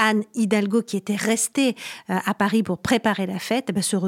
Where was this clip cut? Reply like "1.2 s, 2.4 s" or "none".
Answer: none

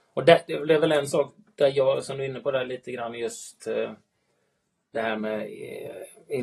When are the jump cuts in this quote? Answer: none

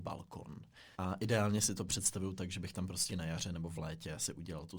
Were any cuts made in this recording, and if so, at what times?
0.9 s, 3.1 s

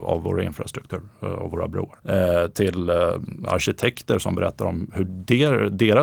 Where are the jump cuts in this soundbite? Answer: 2.0 s

